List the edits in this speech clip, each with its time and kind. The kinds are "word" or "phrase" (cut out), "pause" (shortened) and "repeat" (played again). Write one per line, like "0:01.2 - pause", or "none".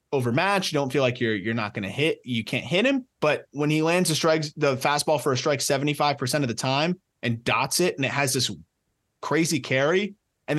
0:03.1 - pause